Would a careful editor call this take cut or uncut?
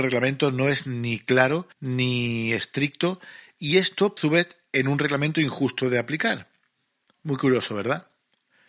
cut